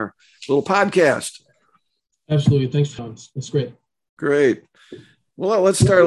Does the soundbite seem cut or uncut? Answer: cut